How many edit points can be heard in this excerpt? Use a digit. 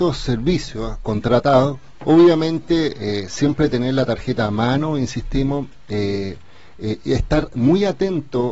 0